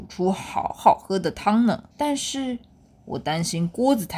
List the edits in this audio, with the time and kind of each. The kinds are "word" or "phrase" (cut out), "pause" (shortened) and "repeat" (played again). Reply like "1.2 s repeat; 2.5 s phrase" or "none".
1.9 s pause

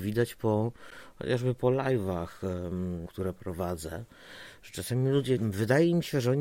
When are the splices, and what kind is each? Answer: 3.1 s phrase; 5.4 s word

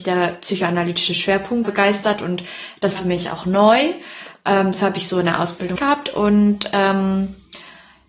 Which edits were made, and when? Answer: 1.6 s word; 3.0 s word; 5.8 s word

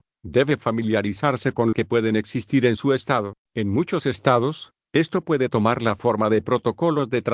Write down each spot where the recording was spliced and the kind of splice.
1.7 s phrase; 3.4 s pause

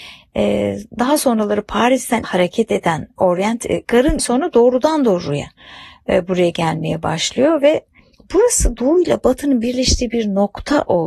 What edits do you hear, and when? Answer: 2.2 s word; 3.8 s word; 4.2 s word

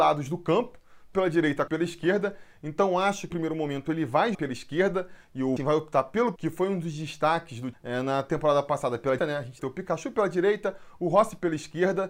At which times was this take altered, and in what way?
1.1 s word; 1.7 s word; 3.3 s word; 4.3 s word; 5.6 s word; 6.4 s word; 7.7 s word; 9.2 s word; 9.6 s word

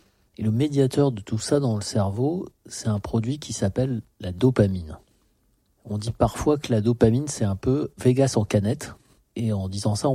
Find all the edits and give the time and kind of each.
none

